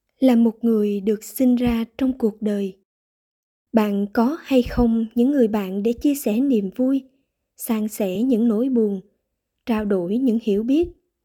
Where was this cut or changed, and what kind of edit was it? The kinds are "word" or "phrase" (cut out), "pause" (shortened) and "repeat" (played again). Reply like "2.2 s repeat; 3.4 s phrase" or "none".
none